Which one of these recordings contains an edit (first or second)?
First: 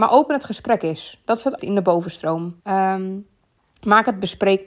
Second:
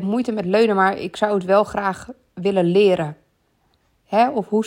first